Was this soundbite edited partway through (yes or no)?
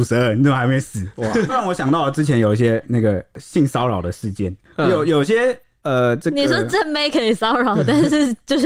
yes